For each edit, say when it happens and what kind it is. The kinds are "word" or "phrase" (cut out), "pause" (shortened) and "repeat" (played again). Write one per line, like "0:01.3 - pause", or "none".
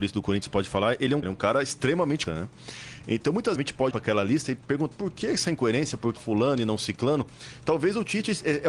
0:01.2 - phrase
0:02.3 - word
0:03.6 - phrase
0:03.9 - word
0:04.9 - word
0:06.2 - word